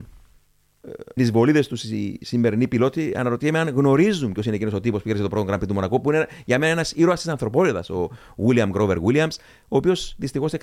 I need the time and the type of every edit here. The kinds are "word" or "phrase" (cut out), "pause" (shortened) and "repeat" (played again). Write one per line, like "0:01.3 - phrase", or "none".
0:01.2 - word